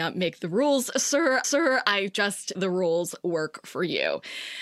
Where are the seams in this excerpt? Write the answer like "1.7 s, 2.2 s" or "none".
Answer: 1.4 s, 2.5 s